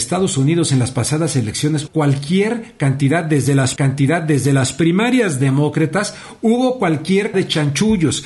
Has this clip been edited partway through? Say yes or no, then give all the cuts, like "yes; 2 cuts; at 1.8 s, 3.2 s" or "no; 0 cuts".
yes; 3 cuts; at 1.9 s, 3.8 s, 7.3 s